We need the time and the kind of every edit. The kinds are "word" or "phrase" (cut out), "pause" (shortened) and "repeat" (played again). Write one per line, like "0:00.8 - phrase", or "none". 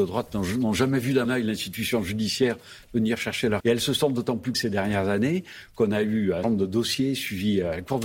0:01.2 - word
0:03.6 - word
0:04.5 - word
0:06.4 - word